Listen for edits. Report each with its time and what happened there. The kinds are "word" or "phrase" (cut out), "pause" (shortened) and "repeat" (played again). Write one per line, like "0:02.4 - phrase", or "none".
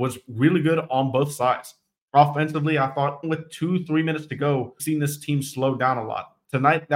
0:03.2 - word
0:04.8 - word